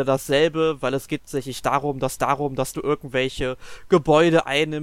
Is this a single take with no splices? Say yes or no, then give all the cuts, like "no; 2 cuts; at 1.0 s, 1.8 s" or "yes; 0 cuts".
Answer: no; 2 cuts; at 1.2 s, 2.2 s